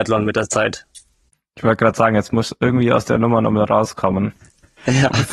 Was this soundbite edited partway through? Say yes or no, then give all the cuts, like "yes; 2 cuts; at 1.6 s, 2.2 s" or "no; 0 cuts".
no; 0 cuts